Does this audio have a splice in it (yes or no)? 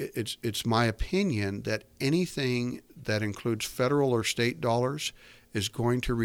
yes